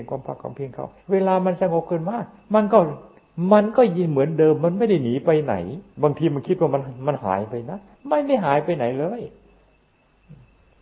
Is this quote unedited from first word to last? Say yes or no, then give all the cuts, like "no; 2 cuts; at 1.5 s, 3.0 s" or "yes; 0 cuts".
no; 3 cuts; at 1.0 s, 5.9 s, 7.9 s